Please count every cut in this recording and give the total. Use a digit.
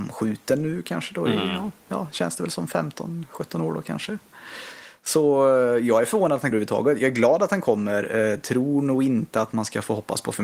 1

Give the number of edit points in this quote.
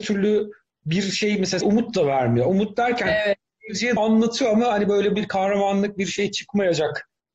3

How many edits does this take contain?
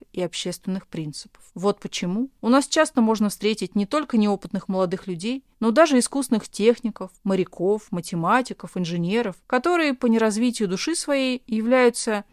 5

